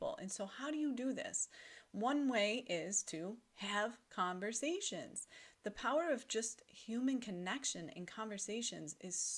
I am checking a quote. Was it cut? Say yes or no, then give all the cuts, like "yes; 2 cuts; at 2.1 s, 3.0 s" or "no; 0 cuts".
no; 0 cuts